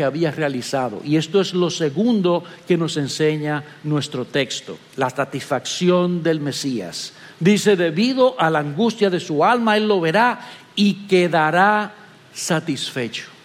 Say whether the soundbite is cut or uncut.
uncut